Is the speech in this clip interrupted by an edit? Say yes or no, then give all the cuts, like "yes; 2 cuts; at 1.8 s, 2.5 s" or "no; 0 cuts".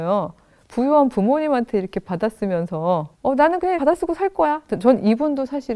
yes; 2 cuts; at 3.1 s, 3.8 s